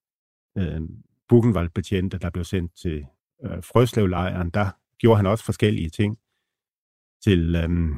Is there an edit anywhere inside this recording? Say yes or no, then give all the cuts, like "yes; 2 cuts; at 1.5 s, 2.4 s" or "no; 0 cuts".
no; 0 cuts